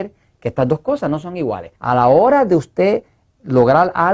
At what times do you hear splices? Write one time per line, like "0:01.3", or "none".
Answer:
0:01.8